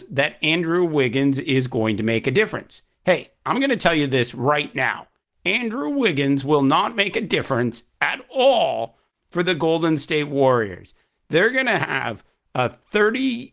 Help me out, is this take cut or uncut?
uncut